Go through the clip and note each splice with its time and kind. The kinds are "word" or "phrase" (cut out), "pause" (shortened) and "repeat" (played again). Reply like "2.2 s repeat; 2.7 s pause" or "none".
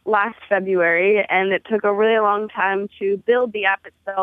none